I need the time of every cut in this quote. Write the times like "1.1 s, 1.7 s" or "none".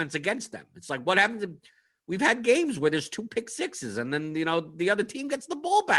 none